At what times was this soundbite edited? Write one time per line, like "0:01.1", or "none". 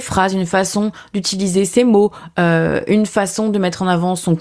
none